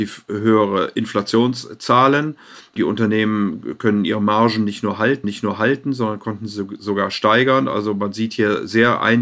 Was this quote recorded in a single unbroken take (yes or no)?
no